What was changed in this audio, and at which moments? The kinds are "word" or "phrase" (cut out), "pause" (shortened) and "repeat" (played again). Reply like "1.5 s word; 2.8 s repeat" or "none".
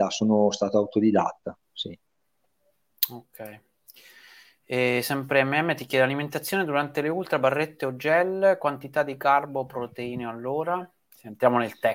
none